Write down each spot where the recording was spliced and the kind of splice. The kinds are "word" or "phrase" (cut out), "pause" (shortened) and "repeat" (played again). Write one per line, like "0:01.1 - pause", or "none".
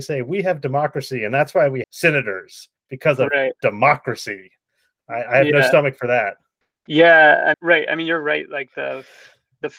0:01.8 - word
0:02.8 - pause
0:05.0 - word
0:06.6 - pause
0:07.5 - word